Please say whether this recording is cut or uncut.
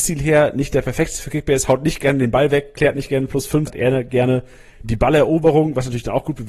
cut